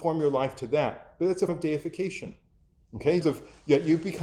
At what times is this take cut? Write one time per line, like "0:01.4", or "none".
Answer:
0:01.5
0:03.2

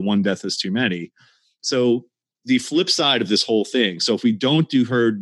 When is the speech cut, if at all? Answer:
none

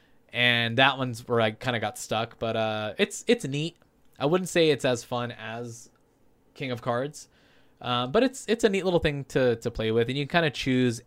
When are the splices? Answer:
none

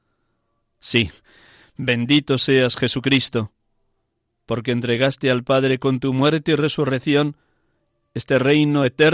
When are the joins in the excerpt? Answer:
none

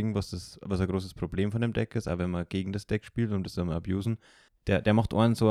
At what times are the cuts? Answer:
0:04.5

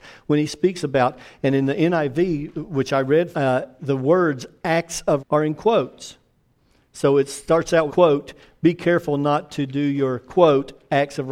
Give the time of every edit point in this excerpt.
0:03.3
0:03.8
0:05.2
0:07.9

